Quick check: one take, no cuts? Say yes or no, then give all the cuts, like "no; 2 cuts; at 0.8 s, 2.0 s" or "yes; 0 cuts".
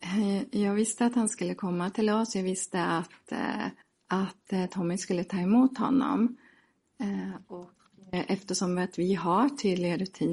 no; 1 cut; at 3.8 s